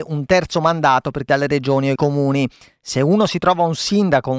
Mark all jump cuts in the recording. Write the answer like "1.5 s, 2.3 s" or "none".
1.3 s, 2.0 s